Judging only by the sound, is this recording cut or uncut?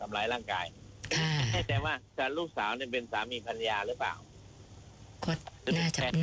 cut